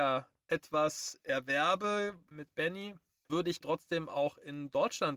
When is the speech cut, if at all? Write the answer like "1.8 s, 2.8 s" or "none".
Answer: 2.3 s, 3.3 s, 3.6 s